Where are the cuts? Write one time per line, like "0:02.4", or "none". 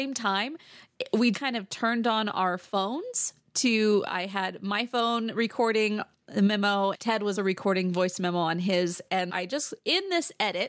0:01.3
0:06.9
0:07.4
0:09.3